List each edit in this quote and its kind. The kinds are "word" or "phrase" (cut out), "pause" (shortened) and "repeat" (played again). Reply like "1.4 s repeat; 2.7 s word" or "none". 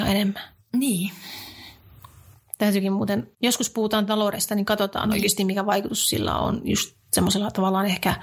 3.3 s pause